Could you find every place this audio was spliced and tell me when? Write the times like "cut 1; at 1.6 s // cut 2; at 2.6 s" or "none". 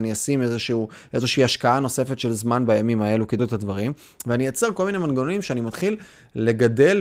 cut 1; at 3.4 s